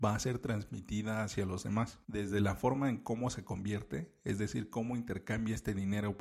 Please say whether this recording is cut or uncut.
uncut